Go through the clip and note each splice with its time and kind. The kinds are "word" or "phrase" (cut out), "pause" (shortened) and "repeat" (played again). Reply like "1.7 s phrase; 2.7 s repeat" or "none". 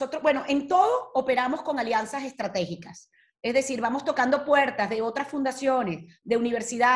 none